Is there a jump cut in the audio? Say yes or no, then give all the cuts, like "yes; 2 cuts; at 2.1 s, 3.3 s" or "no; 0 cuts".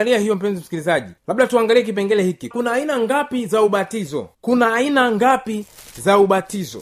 yes; 3 cuts; at 1.2 s, 2.5 s, 4.3 s